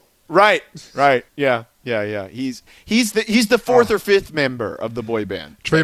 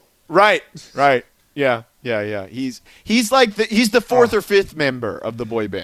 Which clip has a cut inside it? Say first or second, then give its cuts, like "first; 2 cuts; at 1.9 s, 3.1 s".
first; 2 cuts; at 1.3 s, 3.1 s